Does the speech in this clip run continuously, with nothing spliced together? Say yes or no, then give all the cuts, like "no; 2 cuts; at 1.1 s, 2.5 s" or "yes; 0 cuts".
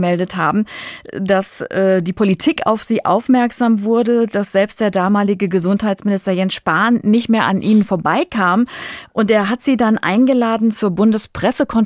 yes; 0 cuts